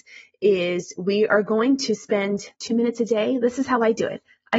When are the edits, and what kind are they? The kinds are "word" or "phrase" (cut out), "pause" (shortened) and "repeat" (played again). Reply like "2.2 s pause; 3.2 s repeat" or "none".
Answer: 2.5 s pause